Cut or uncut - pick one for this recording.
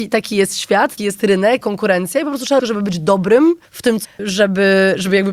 cut